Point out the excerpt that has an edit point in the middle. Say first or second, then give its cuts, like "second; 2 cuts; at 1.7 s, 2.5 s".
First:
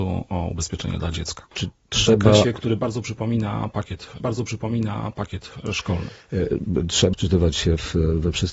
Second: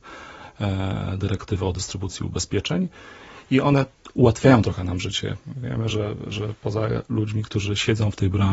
first; 2 cuts; at 4.2 s, 7.1 s